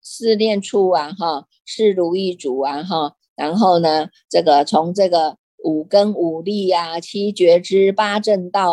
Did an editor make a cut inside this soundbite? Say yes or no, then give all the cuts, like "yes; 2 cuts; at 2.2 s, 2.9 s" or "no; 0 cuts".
no; 0 cuts